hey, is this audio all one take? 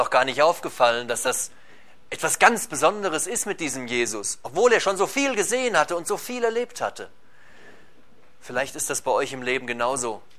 yes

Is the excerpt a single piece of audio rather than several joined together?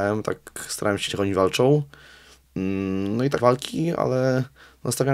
no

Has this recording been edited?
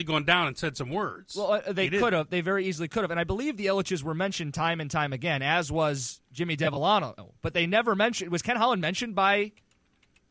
yes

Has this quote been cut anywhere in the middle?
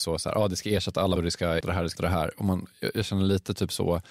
yes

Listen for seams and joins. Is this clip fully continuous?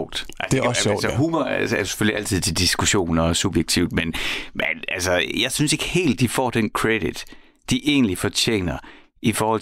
yes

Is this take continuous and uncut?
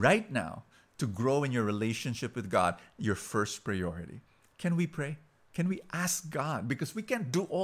yes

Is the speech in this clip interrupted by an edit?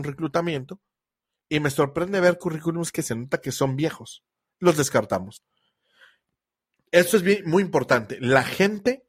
no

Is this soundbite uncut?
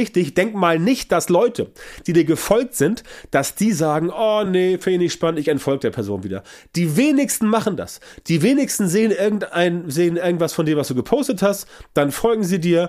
yes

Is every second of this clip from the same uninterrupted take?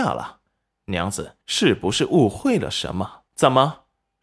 no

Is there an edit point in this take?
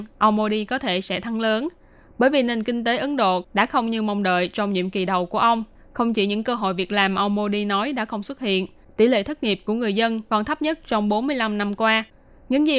no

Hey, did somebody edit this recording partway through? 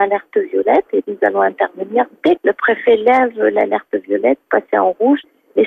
yes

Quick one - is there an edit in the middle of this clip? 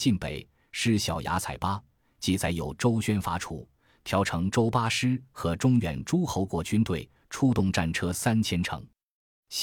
no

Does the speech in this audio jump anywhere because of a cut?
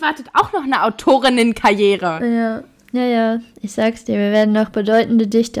no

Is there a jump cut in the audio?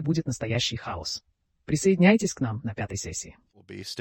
no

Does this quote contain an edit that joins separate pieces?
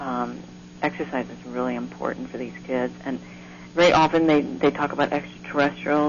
no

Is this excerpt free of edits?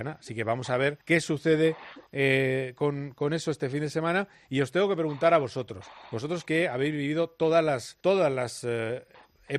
no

